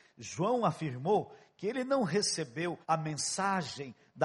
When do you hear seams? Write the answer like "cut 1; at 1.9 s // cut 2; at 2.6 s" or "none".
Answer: cut 1; at 2.8 s